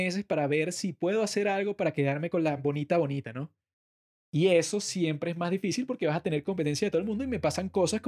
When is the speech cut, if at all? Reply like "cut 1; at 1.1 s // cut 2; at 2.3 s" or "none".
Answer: none